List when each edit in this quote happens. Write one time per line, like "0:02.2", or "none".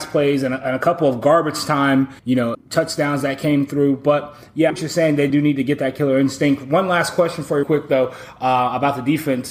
0:02.2
0:02.5
0:04.7
0:05.3
0:07.6